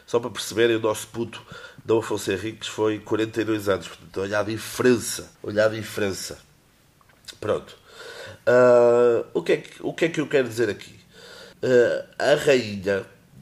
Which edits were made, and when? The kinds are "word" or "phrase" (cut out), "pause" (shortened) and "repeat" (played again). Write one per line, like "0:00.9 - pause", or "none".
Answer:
0:05.3 - pause
0:11.5 - pause